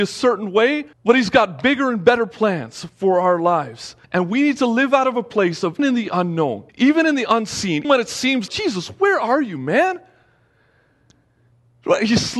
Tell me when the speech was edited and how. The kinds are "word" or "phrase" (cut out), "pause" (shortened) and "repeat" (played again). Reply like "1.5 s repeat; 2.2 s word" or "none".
0.9 s pause; 4.0 s pause; 5.8 s word; 6.7 s pause; 7.8 s word; 8.5 s word